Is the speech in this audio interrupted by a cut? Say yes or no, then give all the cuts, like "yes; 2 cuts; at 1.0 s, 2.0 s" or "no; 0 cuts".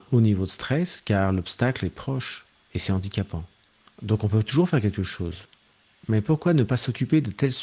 no; 0 cuts